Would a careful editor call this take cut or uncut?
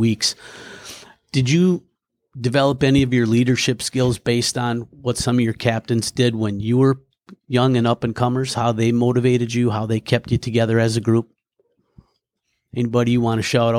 uncut